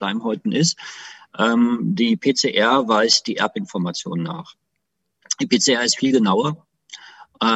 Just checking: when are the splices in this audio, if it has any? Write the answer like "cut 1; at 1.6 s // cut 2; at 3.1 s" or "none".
none